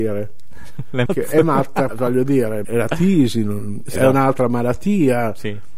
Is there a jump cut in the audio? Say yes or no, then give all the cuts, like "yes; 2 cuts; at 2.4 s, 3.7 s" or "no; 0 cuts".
yes; 4 cuts; at 1.1 s, 1.9 s, 2.6 s, 4.0 s